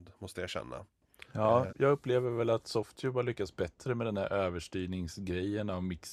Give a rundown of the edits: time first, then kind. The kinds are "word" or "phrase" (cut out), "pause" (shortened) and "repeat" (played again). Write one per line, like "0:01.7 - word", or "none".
0:01.7 - word